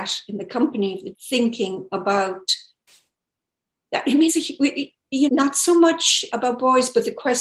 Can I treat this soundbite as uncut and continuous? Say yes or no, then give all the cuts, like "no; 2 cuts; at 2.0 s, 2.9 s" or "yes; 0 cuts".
no; 4 cuts; at 1.1 s, 4.3 s, 5.3 s, 6.3 s